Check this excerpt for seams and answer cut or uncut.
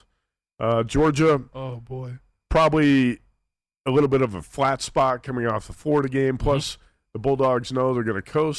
uncut